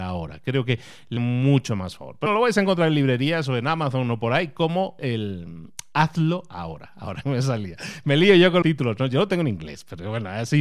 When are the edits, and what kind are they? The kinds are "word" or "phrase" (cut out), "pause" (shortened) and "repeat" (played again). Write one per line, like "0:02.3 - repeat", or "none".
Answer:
0:01.2 - word
0:02.3 - word
0:05.0 - word
0:07.2 - word
0:08.6 - word